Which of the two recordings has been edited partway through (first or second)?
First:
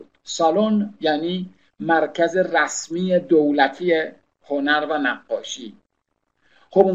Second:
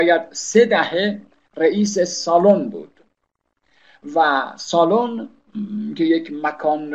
first